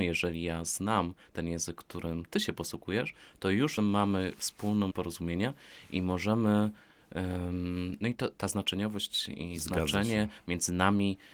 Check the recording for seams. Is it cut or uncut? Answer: cut